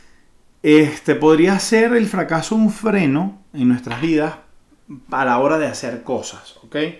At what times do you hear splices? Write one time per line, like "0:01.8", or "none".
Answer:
none